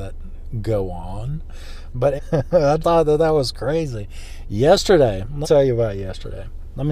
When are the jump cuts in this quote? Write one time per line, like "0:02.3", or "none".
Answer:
0:02.2
0:02.8
0:05.4